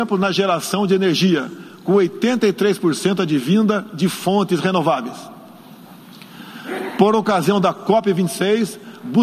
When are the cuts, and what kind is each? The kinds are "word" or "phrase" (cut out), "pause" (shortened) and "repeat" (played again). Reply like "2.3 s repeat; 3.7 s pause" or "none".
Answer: none